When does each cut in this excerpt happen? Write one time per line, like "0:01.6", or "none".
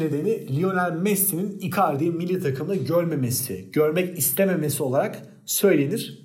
none